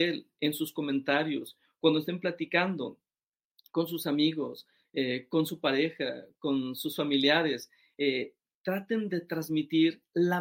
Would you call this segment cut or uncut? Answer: uncut